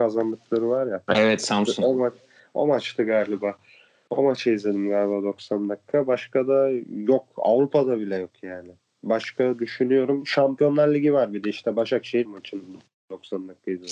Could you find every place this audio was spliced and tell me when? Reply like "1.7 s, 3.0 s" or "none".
1.4 s, 12.3 s